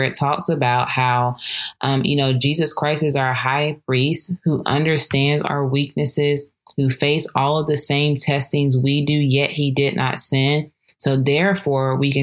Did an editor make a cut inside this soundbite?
no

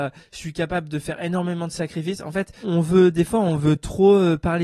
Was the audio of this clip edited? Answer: yes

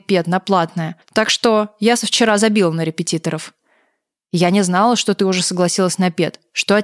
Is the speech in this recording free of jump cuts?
no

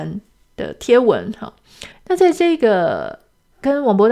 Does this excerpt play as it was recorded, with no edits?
no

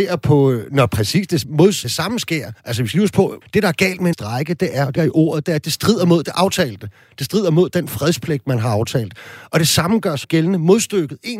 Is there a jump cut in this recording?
yes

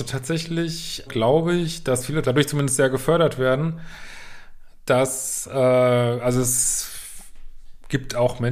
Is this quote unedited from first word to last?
no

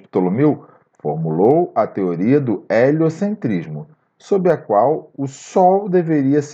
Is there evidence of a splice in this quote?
no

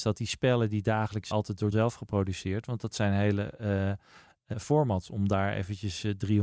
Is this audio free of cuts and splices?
no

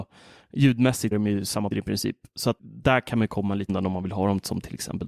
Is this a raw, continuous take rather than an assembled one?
no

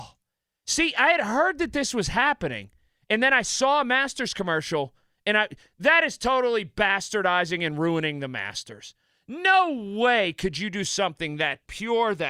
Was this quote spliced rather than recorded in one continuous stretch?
no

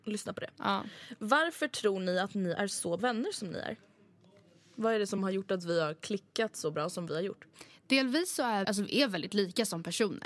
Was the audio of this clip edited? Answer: yes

